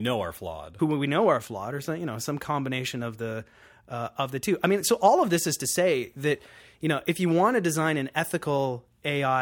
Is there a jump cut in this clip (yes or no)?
no